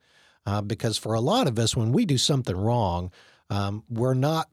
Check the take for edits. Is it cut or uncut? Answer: uncut